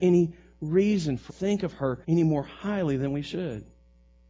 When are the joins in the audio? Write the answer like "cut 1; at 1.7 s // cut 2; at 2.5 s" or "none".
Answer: cut 1; at 1.3 s // cut 2; at 2.0 s